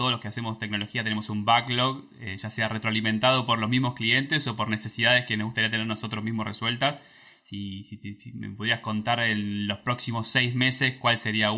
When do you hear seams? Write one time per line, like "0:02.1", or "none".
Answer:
none

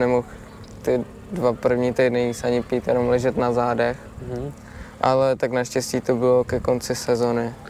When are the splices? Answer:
none

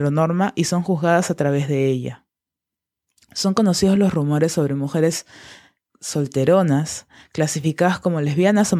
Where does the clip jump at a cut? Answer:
none

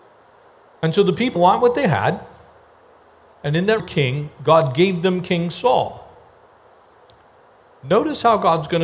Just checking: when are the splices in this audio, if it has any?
0:01.4
0:03.8

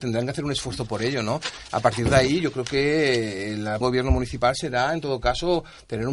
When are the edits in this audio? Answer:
0:03.8

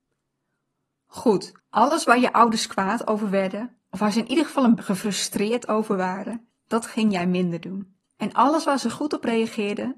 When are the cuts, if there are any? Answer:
0:01.6
0:03.8
0:04.8
0:06.6
0:08.1

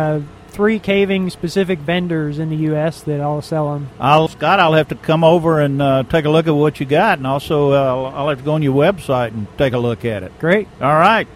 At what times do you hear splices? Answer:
0:04.3

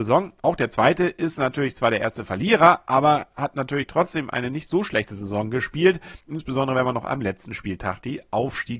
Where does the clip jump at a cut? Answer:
none

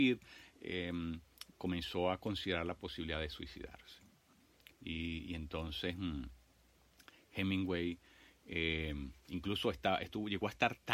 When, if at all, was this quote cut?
none

